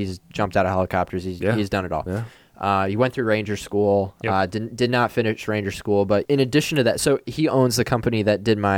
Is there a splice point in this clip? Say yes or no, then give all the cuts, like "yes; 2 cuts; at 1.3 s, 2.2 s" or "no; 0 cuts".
yes; 1 cut; at 7.5 s